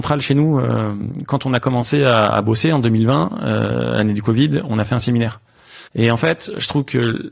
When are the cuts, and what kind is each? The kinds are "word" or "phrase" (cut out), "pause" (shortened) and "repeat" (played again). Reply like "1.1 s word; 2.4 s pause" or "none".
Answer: 5.9 s pause